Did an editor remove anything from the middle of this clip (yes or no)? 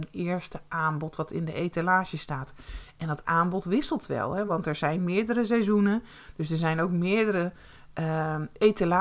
no